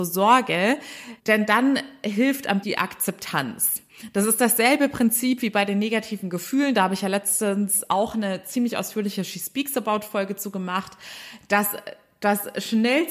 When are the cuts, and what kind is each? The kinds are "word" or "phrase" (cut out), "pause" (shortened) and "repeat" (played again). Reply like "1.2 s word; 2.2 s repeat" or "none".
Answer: 1.2 s pause; 2.6 s word